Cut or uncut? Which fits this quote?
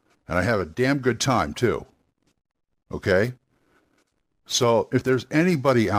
uncut